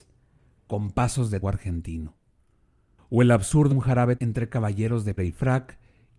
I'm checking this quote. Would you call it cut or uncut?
cut